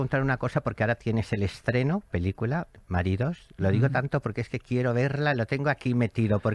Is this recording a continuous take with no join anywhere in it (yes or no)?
no